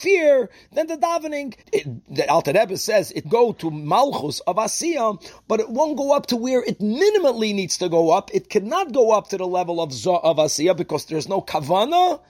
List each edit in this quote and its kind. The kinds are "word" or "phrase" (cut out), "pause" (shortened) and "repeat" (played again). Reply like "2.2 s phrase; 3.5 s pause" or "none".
1.6 s pause; 3.2 s word